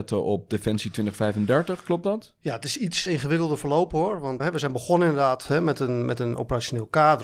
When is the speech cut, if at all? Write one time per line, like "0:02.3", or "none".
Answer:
0:03.1
0:04.4